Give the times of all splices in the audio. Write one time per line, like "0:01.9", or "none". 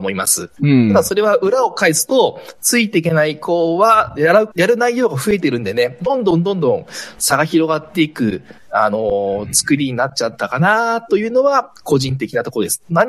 0:04.2
0:04.5